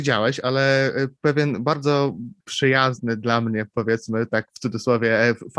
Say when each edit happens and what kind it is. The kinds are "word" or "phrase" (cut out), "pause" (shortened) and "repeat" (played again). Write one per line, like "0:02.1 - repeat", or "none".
0:02.4 - pause